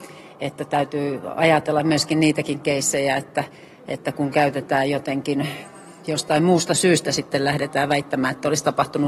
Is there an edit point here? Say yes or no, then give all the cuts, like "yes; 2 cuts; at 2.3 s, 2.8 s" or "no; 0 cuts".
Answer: no; 0 cuts